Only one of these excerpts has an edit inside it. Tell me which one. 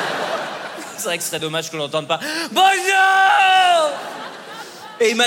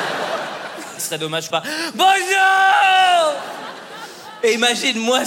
second; 2 cuts; at 1.0 s, 1.5 s

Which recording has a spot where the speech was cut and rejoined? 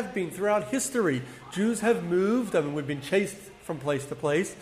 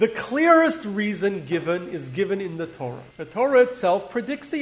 second; 1 cut; at 3.1 s

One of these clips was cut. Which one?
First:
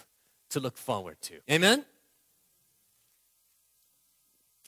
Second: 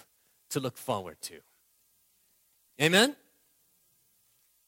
first; 1 cut; at 1.4 s

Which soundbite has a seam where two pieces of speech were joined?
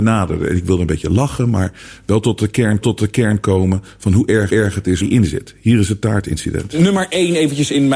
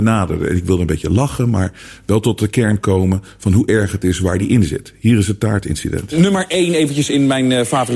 first; 3 cuts; at 2.8 s, 4.5 s, 5.0 s

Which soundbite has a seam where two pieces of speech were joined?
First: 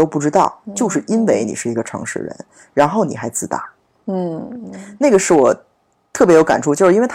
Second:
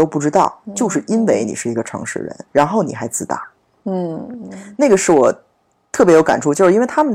second; 1 cut; at 2.5 s

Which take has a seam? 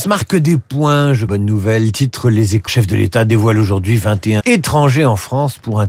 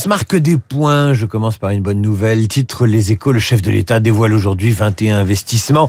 first; 3 cuts; at 1.3 s, 2.7 s, 4.4 s

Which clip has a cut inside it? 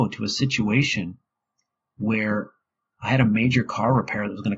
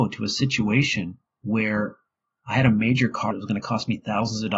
second; 2 cuts; at 1.3 s, 3.3 s

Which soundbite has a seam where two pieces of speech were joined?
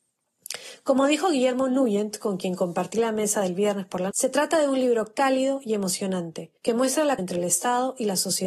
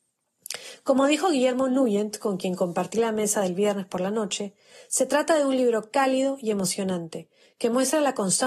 first; 3 cuts; at 4.1 s, 6.6 s, 7.2 s

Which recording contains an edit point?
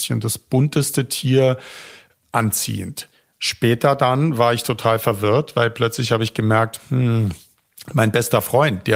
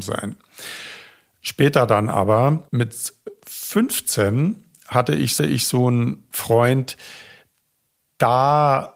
second; 2 cuts; at 2.7 s, 5.4 s

